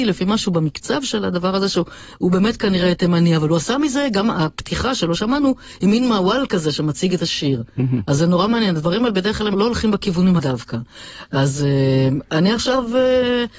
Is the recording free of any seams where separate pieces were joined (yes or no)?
no